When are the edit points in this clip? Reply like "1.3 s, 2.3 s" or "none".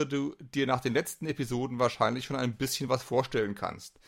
none

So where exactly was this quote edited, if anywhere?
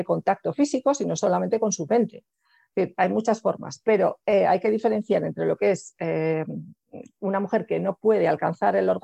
none

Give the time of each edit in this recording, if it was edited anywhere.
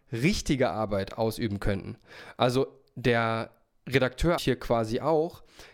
4.4 s

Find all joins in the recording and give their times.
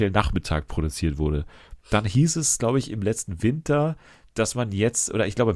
none

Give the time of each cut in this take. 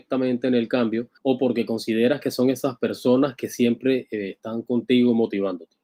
1.2 s

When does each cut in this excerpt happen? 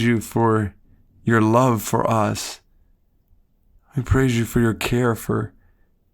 none

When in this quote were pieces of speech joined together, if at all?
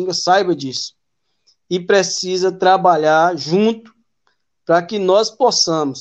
none

